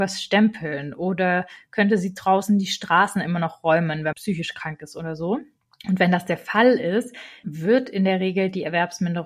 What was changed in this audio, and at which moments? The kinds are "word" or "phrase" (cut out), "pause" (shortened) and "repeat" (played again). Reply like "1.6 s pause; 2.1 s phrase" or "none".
4.1 s word; 5.6 s pause; 7.4 s word